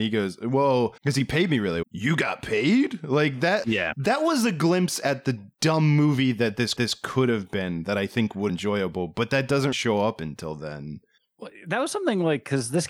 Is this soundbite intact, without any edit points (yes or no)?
no